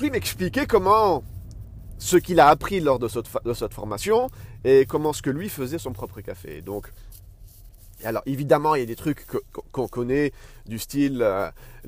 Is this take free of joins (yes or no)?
yes